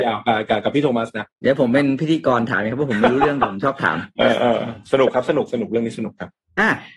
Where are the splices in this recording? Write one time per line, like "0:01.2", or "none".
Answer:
0:01.3